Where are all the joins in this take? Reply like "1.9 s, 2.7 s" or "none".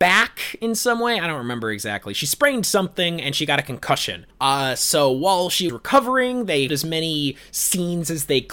4.3 s, 5.7 s, 6.7 s